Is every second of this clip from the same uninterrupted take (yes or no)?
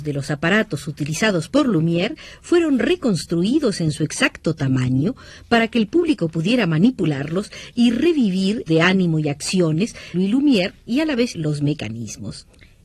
no